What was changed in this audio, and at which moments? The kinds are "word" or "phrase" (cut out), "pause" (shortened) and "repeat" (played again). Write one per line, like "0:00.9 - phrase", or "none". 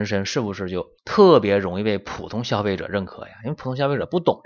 0:01.0 - pause